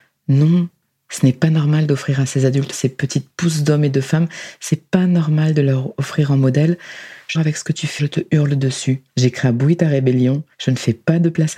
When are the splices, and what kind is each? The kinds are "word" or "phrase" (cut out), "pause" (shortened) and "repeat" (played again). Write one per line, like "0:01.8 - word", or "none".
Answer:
0:02.7 - phrase
0:07.3 - phrase
0:08.0 - word
0:09.1 - pause
0:10.5 - pause